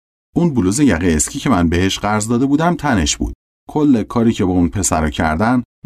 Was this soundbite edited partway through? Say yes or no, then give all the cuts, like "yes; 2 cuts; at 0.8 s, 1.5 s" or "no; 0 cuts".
no; 0 cuts